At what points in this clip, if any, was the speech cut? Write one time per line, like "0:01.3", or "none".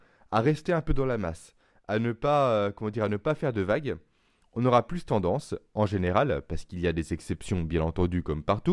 none